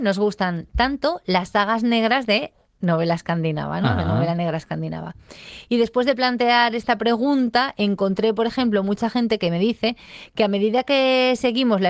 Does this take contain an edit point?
no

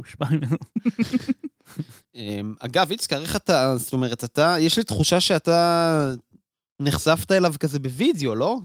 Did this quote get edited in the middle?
no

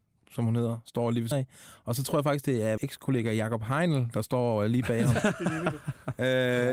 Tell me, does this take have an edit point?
yes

